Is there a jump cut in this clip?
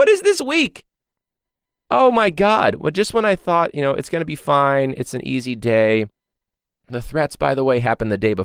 no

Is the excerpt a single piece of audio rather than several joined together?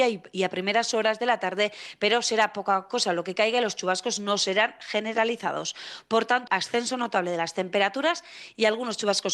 no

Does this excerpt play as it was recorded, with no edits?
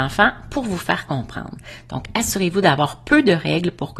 yes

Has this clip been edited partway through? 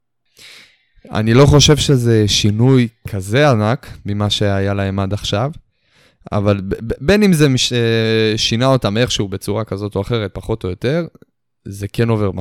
no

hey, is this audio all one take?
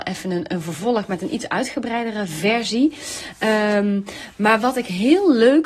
yes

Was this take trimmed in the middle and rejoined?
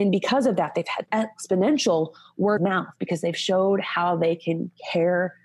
yes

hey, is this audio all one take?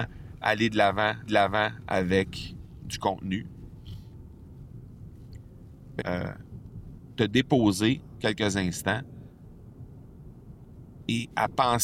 no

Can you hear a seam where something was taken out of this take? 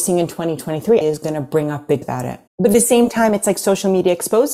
yes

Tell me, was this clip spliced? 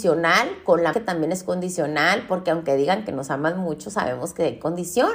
yes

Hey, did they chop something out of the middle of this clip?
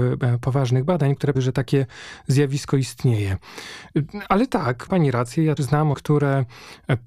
yes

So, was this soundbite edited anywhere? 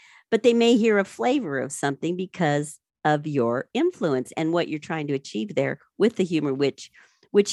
no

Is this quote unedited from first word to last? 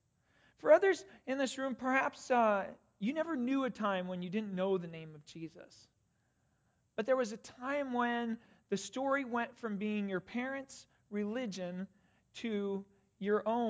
yes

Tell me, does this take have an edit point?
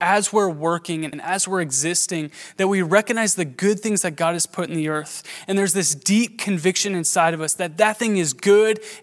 yes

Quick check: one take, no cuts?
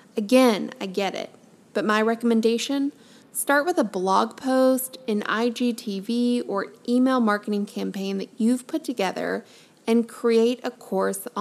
yes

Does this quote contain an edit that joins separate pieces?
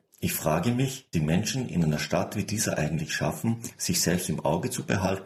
yes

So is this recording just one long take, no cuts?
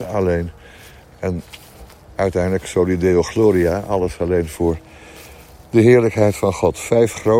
yes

